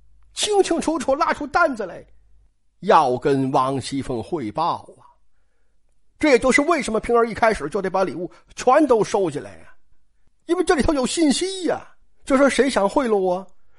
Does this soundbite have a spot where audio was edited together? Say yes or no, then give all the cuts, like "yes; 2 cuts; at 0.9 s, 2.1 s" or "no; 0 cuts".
yes; 2 cuts; at 9.9 s, 12.0 s